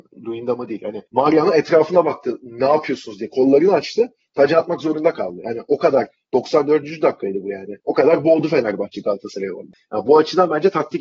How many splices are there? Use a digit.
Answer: 2